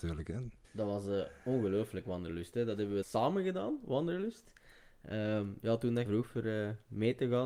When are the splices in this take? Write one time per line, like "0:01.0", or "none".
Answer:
0:02.0
0:03.0
0:06.1